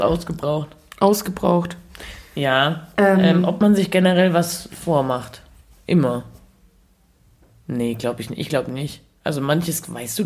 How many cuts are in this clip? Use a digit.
0